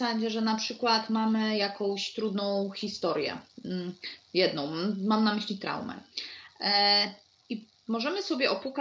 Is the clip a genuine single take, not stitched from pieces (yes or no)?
yes